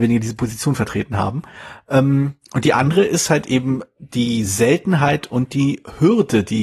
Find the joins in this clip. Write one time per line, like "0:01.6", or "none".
none